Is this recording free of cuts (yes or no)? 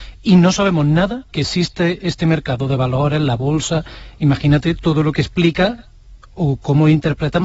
no